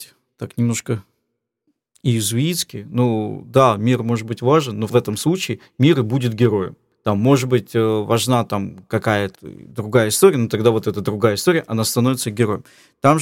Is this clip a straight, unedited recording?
no; 1 cut; at 9.3 s

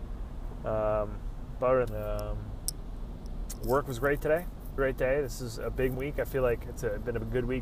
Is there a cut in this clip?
yes; 3 cuts; at 1.8 s, 4.8 s, 5.9 s

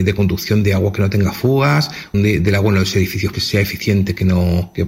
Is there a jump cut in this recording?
yes; 2 cuts; at 2.1 s, 3.3 s

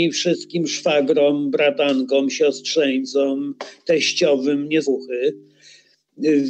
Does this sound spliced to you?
yes; 1 cut; at 4.8 s

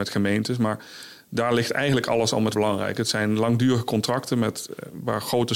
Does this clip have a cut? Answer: yes; 1 cut; at 2.5 s

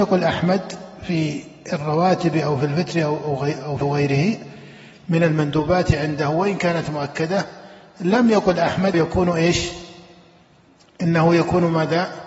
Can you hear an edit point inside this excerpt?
yes; 2 cuts; at 3.8 s, 8.9 s

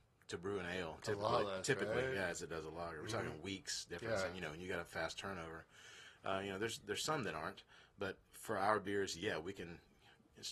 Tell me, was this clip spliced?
yes; 1 cut; at 8.3 s

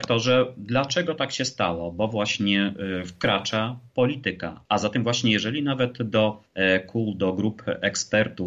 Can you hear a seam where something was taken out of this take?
yes; 2 cuts; at 4.7 s, 6.5 s

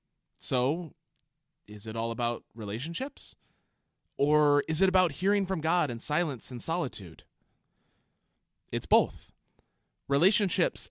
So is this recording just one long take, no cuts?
yes; 0 cuts

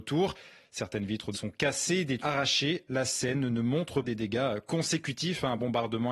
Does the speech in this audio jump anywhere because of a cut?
yes; 4 cuts; at 1.3 s, 2.2 s, 2.9 s, 4.0 s

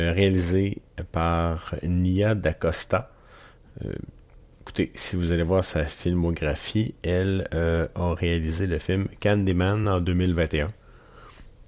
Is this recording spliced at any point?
no; 0 cuts

